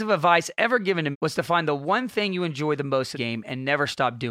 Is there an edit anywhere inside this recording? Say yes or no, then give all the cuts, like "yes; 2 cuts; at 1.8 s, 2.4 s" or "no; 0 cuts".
yes; 2 cuts; at 1.1 s, 3.1 s